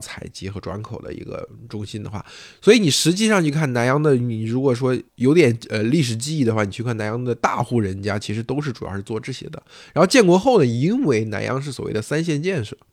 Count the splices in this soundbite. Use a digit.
1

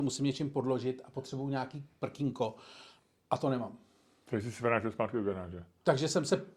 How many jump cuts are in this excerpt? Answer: 0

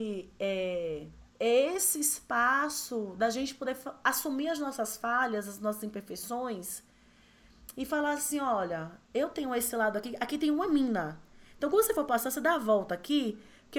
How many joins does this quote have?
1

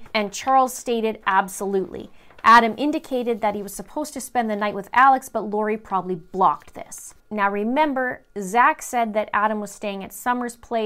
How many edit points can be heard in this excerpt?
1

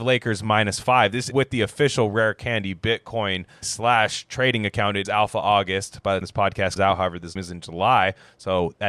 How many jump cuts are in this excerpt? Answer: 6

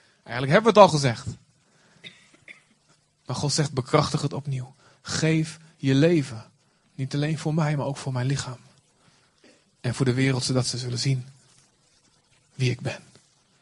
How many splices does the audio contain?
0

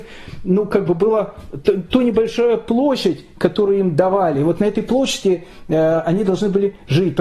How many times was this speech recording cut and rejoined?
0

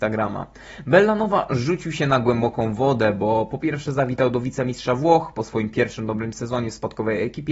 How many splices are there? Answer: 0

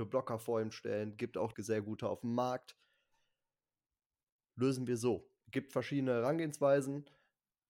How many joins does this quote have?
2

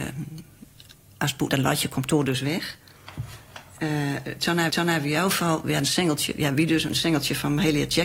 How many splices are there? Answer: 2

